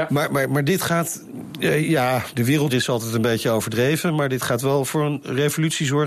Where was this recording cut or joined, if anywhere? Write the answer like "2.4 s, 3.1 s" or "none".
2.7 s

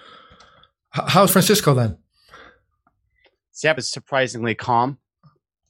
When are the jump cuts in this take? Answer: 1.3 s, 3.8 s

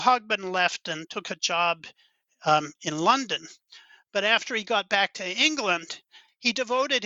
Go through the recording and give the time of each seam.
none

